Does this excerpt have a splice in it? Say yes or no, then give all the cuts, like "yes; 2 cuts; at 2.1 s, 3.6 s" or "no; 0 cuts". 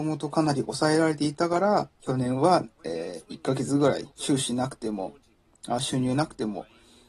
yes; 2 cuts; at 1.9 s, 4.1 s